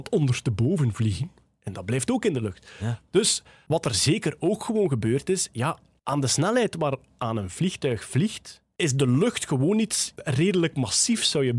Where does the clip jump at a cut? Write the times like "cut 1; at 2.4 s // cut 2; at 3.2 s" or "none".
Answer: none